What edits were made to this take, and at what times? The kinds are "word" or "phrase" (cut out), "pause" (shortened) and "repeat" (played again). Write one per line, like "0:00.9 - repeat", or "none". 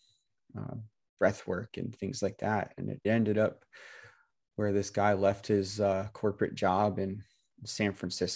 0:03.0 - word